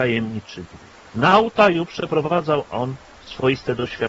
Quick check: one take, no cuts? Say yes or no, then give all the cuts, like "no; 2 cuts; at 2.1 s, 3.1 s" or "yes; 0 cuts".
yes; 0 cuts